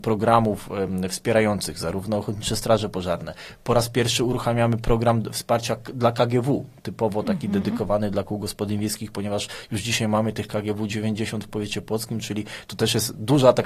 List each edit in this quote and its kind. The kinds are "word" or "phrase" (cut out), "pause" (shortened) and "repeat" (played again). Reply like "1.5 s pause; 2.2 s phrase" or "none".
none